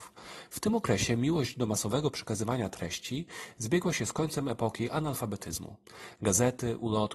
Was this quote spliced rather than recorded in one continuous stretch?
no; 0 cuts

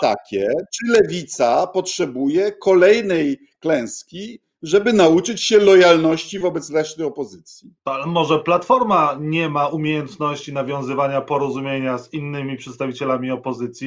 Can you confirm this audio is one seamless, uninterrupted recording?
no; 1 cut; at 7.8 s

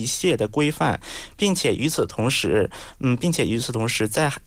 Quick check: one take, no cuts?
yes; 0 cuts

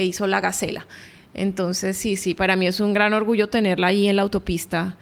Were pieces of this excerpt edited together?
no; 0 cuts

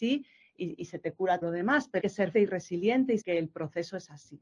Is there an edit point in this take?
yes; 4 cuts; at 1.4 s, 2.0 s, 2.3 s, 3.2 s

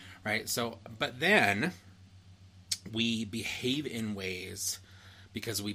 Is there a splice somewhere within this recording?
no; 0 cuts

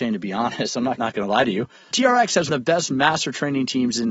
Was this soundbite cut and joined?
yes; 3 cuts; at 1.0 s, 1.9 s, 2.5 s

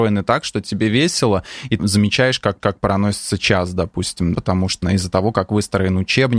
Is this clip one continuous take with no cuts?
no; 4 cuts; at 1.8 s, 2.6 s, 4.3 s, 4.8 s

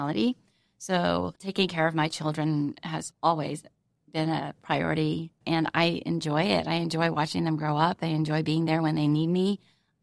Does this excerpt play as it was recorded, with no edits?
yes; 0 cuts

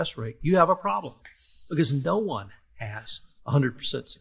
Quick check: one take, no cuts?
yes; 0 cuts

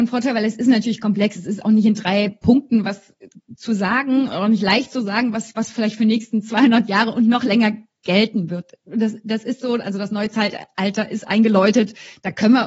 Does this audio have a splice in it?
no; 0 cuts

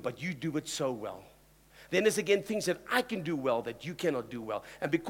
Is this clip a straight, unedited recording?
yes; 0 cuts

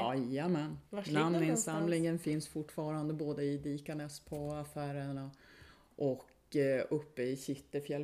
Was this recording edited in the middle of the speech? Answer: no; 0 cuts

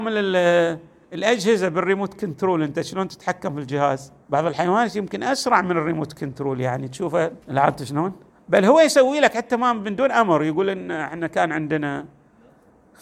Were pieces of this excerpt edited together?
yes; 3 cuts; at 4.2 s, 7.4 s, 8.3 s

